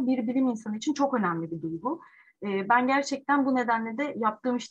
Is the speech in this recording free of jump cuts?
yes; 0 cuts

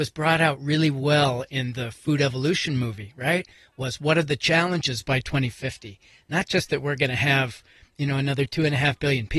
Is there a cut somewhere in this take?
no; 0 cuts

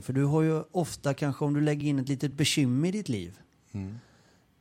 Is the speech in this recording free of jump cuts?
yes; 0 cuts

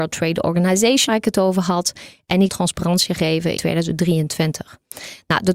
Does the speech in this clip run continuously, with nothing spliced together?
no; 3 cuts; at 1.1 s, 2.5 s, 3.6 s

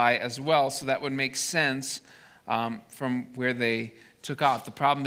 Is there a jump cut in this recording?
no; 0 cuts

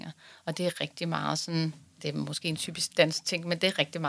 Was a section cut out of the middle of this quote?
no; 0 cuts

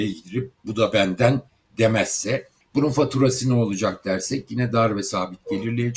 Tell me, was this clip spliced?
yes; 1 cut; at 2.6 s

